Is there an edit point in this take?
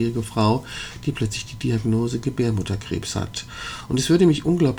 no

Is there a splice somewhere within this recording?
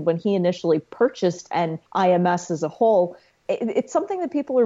yes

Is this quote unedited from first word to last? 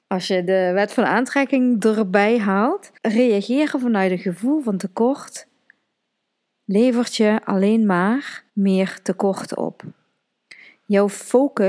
no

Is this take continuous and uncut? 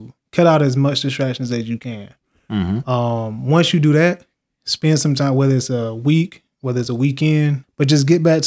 yes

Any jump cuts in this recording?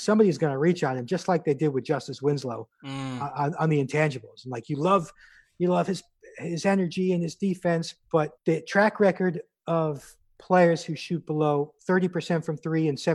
yes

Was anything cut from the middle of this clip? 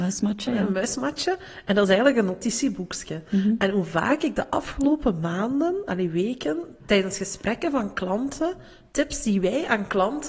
no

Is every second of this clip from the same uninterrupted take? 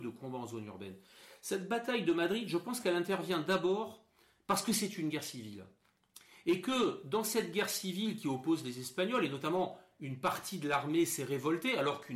yes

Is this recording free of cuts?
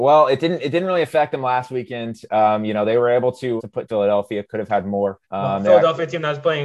no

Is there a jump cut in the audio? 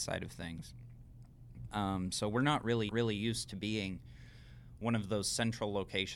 yes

